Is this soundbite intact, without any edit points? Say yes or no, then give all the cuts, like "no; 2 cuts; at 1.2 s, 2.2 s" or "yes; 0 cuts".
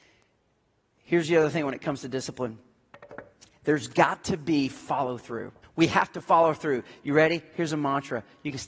no; 1 cut; at 5.6 s